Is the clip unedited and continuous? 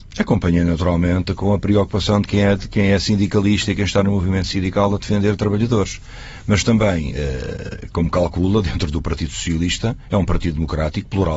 yes; 0 cuts

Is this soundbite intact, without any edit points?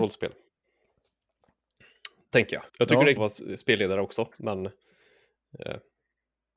no; 2 cuts; at 2.7 s, 3.2 s

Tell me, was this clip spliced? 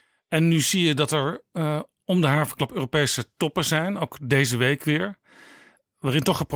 no; 0 cuts

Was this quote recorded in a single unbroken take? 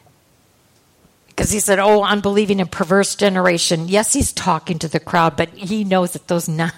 yes; 0 cuts

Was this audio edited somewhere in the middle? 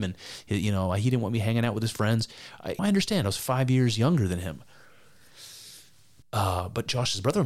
yes; 2 cuts; at 2.8 s, 6.2 s

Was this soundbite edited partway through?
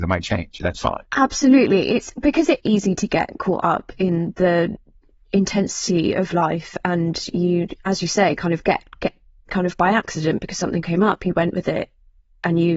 yes; 3 cuts; at 1.0 s, 2.6 s, 9.5 s

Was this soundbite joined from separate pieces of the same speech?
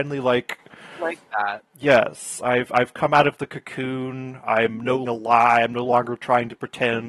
yes; 1 cut; at 5.1 s

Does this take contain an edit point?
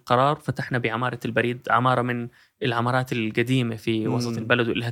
no; 0 cuts

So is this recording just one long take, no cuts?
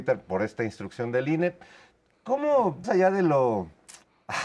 no; 1 cut; at 2.8 s

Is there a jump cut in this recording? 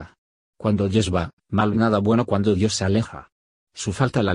yes; 1 cut; at 1.7 s

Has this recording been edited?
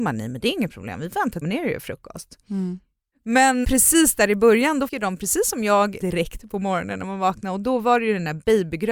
yes; 4 cuts; at 1.4 s, 3.6 s, 4.9 s, 6.0 s

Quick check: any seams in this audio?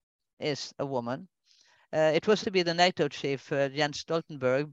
yes; 1 cut; at 2.4 s

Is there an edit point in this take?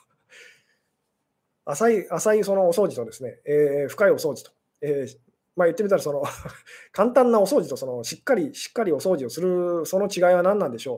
no; 0 cuts

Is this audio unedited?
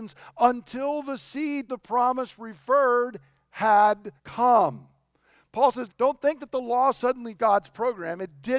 no; 4 cuts; at 1.7 s, 4.2 s, 5.9 s, 7.4 s

